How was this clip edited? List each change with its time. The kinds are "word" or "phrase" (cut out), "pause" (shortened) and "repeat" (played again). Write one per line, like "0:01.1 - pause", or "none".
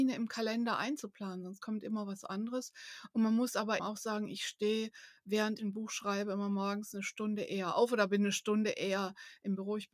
0:03.8 - word
0:05.6 - word